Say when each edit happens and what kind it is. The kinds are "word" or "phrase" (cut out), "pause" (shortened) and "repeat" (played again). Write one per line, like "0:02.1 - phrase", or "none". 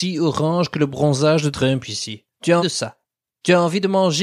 0:01.5 - word
0:02.6 - word

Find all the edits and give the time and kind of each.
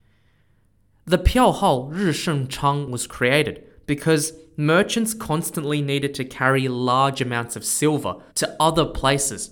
0:08.3 - pause

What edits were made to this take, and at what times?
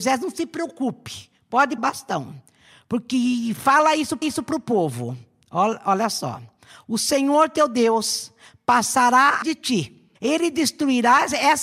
0:01.8 - word
0:04.2 - repeat
0:09.4 - word
0:10.2 - pause

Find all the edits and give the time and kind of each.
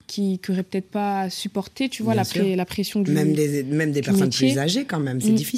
none

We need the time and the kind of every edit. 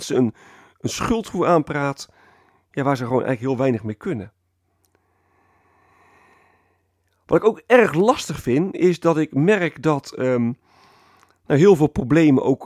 none

